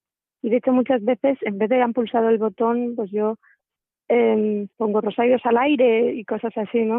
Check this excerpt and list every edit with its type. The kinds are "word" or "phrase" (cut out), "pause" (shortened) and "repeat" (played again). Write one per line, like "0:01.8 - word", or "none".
none